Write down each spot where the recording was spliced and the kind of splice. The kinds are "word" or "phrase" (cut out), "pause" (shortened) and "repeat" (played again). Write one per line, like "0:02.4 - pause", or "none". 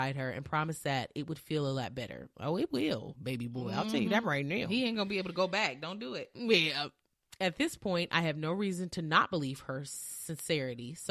none